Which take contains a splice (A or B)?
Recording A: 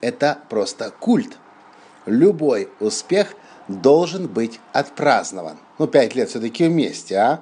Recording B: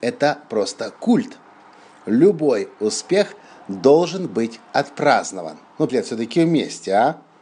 B